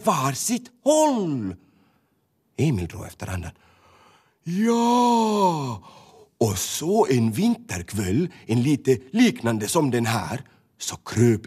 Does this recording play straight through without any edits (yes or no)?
yes